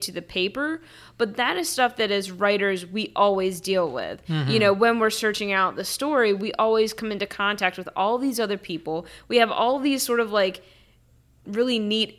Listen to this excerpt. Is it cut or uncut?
uncut